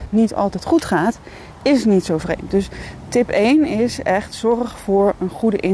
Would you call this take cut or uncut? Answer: uncut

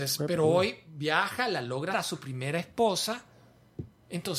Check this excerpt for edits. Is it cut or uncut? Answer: cut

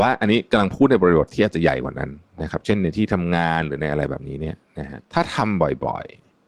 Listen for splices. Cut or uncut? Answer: cut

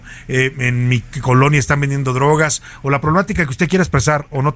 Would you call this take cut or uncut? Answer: uncut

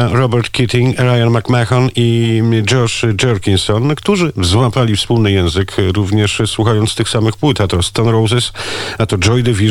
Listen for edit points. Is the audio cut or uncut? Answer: uncut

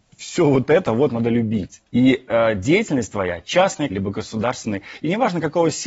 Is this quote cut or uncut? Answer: cut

